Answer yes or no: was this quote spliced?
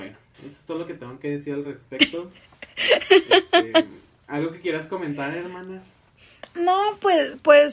no